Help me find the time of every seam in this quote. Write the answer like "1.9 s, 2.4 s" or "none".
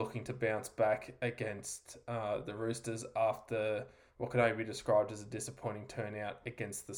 none